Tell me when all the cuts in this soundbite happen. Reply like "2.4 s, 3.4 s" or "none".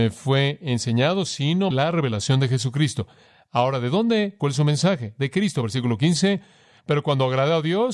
1.7 s, 4.4 s